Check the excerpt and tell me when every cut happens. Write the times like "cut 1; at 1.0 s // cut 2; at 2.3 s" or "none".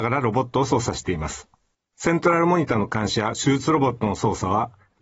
cut 1; at 1.7 s